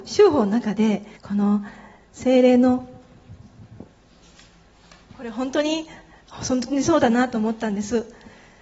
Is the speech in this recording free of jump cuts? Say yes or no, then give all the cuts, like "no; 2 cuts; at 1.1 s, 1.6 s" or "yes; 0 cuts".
no; 1 cut; at 1.2 s